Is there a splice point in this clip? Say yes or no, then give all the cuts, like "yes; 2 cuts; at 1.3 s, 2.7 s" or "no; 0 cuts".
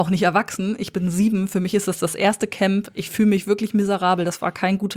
no; 0 cuts